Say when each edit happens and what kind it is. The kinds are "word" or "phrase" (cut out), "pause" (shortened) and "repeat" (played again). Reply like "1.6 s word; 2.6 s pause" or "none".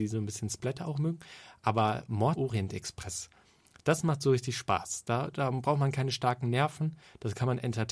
2.4 s word